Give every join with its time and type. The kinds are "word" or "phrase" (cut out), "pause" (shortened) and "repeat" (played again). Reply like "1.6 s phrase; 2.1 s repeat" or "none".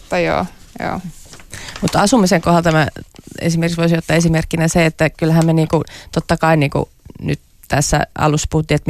none